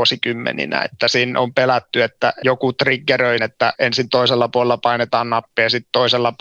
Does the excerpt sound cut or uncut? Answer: cut